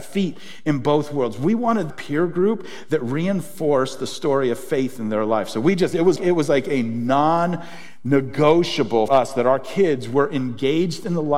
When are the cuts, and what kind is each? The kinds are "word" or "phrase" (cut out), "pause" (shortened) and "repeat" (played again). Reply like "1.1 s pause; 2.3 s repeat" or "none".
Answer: 1.9 s phrase; 6.2 s word; 9.1 s word